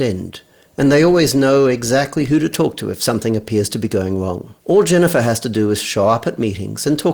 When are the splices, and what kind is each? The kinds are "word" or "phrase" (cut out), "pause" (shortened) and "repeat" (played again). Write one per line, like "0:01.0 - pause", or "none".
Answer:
0:04.6 - pause